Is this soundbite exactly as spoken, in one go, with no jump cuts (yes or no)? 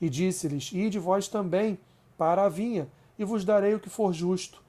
yes